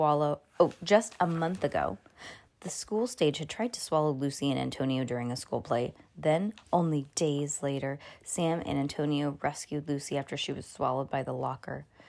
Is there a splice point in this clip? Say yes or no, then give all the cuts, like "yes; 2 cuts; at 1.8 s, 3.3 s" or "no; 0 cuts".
no; 0 cuts